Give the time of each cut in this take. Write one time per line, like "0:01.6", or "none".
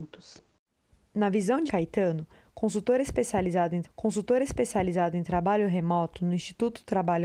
0:01.7
0:03.8